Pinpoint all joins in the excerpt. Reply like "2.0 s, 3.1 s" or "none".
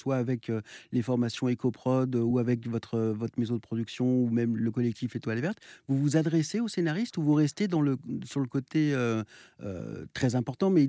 none